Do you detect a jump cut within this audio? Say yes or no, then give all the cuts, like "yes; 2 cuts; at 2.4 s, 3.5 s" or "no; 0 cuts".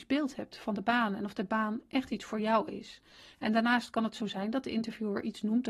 no; 0 cuts